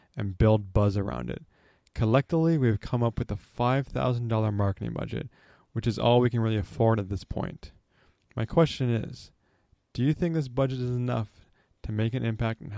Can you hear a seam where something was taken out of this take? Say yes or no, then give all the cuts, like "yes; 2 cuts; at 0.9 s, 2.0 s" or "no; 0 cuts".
no; 0 cuts